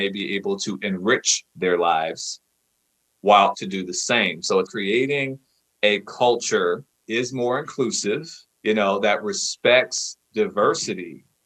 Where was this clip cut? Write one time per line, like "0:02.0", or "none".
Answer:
0:03.5
0:04.7
0:07.0
0:08.5